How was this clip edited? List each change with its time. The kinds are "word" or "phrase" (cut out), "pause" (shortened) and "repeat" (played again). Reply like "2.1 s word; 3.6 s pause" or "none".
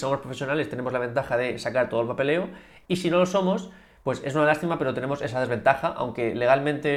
none